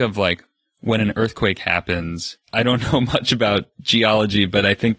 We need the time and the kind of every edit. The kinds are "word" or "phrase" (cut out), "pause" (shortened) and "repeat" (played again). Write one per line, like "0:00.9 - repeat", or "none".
0:02.4 - pause
0:03.7 - pause